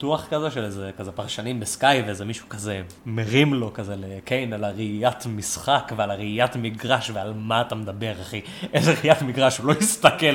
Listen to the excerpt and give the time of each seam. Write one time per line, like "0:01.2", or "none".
0:03.0